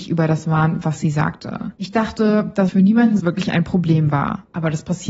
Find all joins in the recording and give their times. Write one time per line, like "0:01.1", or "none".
0:01.8
0:02.7
0:03.2